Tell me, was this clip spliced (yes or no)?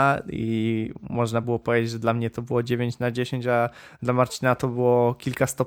no